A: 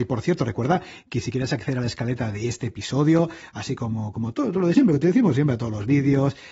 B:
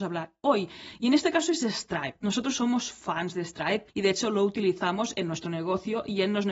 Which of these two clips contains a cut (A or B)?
B